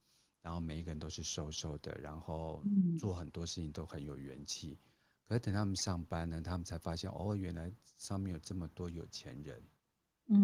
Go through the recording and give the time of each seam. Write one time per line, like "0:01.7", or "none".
none

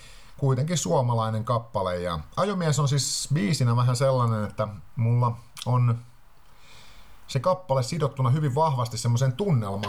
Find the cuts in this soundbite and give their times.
none

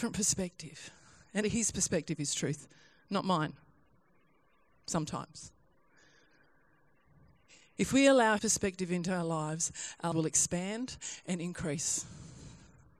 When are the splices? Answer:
0:01.4
0:08.4
0:10.1

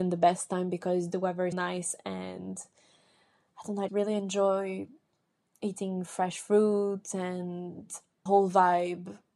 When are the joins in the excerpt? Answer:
0:01.5
0:03.9
0:08.3

